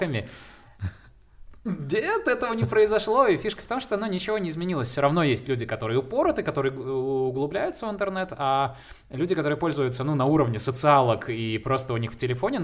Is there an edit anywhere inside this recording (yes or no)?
no